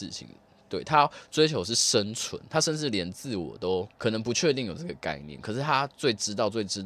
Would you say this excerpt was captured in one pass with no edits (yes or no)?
no